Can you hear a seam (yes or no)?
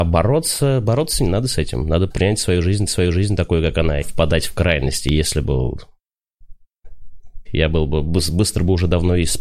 yes